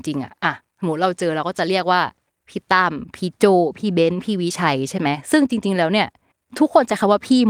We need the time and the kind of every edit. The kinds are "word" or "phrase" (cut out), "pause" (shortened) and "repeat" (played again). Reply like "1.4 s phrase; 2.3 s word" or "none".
2.3 s pause; 6.3 s pause